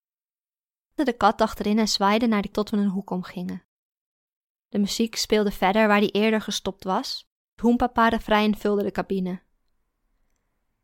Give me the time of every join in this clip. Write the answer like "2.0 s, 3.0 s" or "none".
1.0 s, 2.5 s, 7.6 s